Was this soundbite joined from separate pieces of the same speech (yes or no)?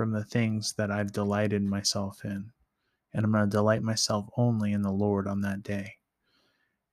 no